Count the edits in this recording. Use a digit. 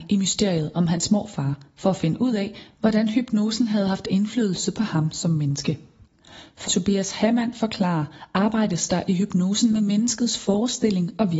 1